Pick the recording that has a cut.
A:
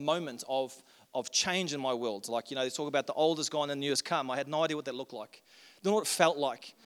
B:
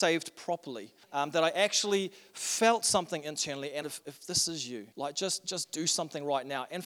B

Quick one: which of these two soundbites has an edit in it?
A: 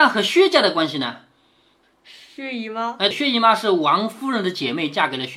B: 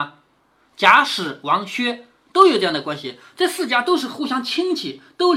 A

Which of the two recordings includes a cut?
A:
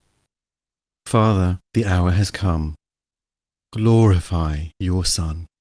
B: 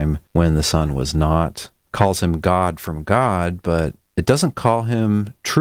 B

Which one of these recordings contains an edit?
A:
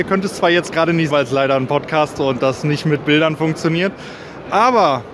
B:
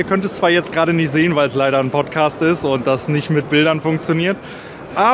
A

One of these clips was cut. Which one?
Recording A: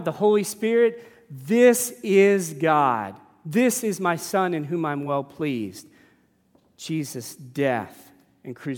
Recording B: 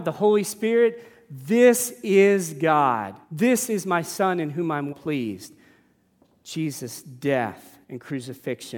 B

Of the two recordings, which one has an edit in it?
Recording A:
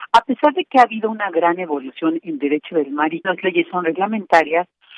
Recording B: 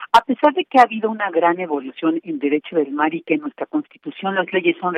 A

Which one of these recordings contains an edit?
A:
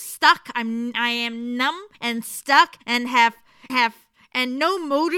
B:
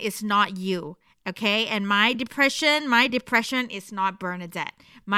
A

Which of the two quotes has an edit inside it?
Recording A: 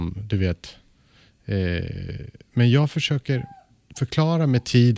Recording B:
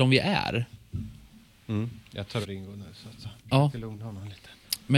B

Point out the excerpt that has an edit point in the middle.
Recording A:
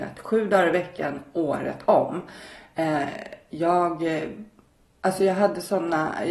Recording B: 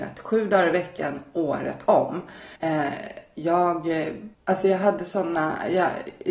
B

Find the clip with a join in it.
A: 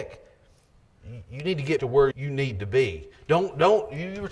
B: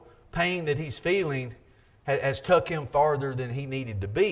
A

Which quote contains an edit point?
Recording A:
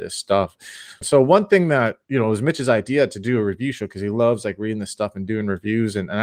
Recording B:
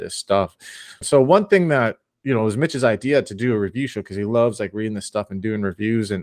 A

